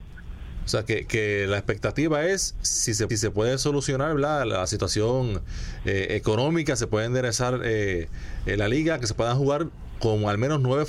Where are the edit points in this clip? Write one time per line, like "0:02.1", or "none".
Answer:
0:03.1